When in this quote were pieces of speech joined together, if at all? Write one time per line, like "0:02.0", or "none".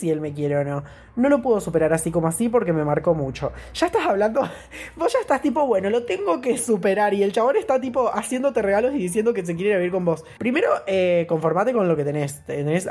0:10.4